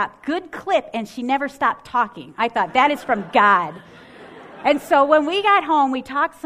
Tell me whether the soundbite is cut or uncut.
uncut